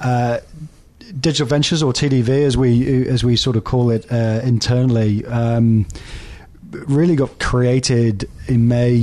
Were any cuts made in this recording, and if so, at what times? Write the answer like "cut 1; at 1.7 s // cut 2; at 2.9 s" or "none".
none